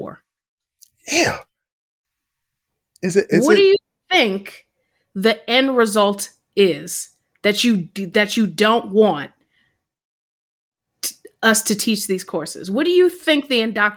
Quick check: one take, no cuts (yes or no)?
yes